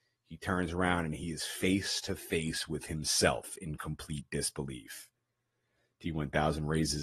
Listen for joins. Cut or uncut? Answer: uncut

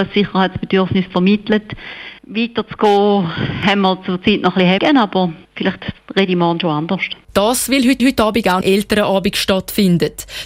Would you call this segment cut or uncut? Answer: cut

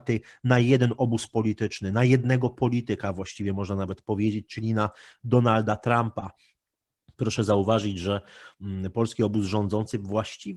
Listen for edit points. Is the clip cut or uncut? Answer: uncut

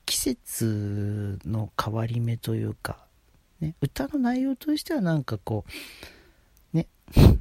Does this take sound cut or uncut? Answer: uncut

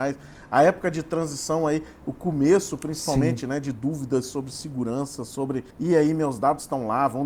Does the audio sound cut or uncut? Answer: cut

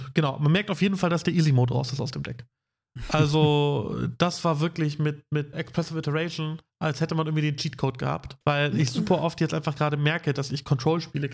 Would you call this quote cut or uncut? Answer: cut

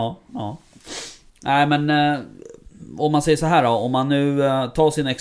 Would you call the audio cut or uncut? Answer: cut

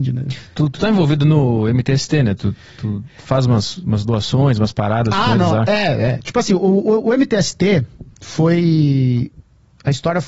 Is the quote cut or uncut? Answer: uncut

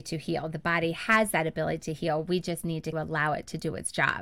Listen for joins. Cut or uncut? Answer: cut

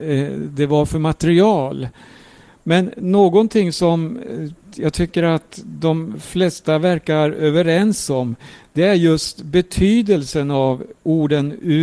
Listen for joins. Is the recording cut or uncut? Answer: uncut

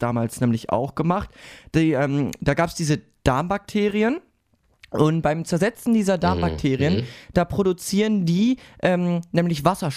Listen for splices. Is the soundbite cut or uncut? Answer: uncut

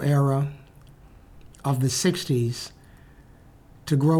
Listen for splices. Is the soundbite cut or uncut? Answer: cut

